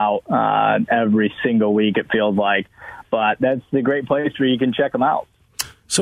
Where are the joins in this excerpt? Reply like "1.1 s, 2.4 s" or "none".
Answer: none